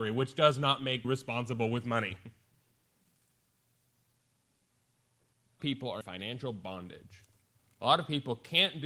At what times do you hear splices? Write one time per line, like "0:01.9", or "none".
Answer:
0:01.0
0:05.6
0:06.0